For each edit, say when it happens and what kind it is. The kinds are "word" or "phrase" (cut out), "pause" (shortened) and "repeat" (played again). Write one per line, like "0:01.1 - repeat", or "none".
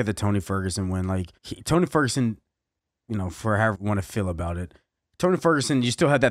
0:01.4 - pause
0:03.7 - word